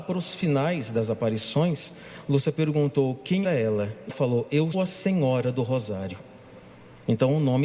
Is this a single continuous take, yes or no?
no